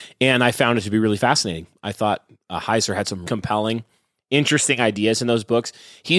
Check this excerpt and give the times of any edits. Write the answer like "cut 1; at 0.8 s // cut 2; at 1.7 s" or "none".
cut 1; at 3.2 s

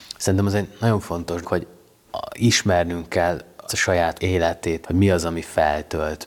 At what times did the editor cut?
cut 1; at 1.4 s // cut 2; at 3.7 s // cut 3; at 4.2 s // cut 4; at 4.8 s

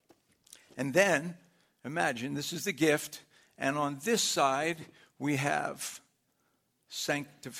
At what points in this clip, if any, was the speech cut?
none

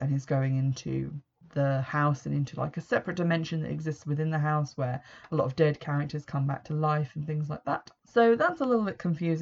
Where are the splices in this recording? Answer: none

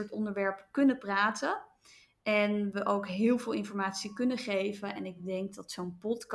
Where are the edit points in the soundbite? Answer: none

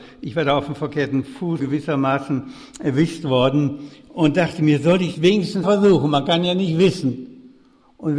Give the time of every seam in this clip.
cut 1; at 1.6 s // cut 2; at 5.1 s // cut 3; at 5.6 s

